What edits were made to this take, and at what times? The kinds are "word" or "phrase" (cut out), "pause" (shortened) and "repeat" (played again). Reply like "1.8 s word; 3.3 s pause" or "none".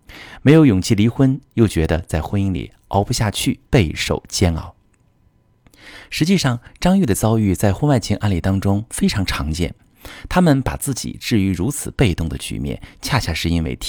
3.7 s pause